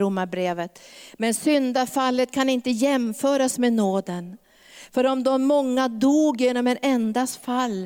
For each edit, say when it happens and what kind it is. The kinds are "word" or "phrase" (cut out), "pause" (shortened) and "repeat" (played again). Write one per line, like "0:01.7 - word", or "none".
none